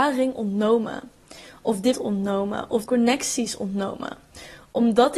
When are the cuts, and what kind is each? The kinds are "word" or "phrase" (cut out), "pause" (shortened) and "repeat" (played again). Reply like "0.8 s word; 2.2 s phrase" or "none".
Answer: 1.9 s word; 2.9 s word